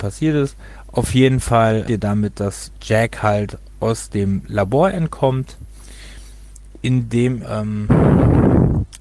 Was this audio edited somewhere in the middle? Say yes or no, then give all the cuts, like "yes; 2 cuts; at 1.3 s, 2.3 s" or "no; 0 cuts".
yes; 2 cuts; at 1.9 s, 7.4 s